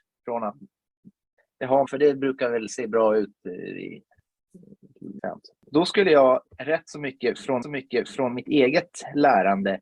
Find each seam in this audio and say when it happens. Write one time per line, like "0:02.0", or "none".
0:01.9
0:05.2
0:06.5
0:07.6